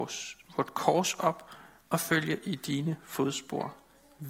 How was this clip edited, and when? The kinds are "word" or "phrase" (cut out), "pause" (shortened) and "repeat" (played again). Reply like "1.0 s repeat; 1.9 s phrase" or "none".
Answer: none